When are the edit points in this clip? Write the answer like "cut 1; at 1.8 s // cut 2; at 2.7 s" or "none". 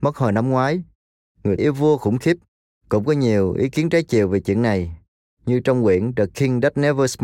cut 1; at 1.6 s